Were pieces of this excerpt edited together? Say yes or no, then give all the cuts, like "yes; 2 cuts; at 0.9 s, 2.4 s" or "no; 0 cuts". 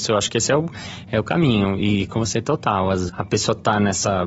yes; 2 cuts; at 2.1 s, 3.1 s